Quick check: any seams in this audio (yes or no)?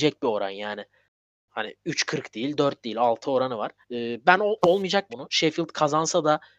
yes